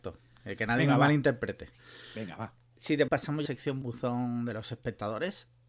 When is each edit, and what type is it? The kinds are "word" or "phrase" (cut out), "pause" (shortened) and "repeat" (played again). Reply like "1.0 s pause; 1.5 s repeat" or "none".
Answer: 3.1 s word; 3.5 s phrase; 3.8 s word